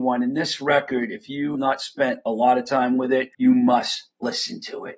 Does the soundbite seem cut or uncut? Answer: cut